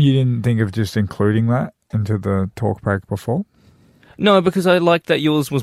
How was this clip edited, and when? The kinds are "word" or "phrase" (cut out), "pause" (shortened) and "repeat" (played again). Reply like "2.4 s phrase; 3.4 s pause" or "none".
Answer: none